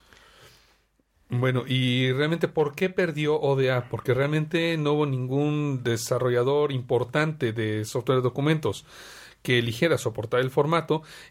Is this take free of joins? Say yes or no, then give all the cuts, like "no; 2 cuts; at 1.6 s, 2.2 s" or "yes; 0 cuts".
yes; 0 cuts